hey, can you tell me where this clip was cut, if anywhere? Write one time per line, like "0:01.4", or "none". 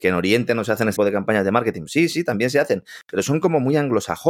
0:01.0